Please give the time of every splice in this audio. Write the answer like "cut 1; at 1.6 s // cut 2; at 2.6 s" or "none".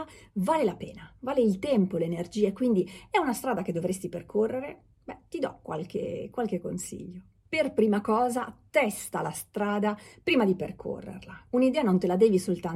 none